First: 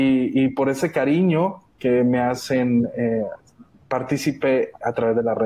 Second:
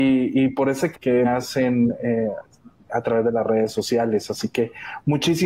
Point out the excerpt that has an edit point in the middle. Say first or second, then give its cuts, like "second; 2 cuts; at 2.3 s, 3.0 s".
second; 3 cuts; at 0.9 s, 1.2 s, 2.9 s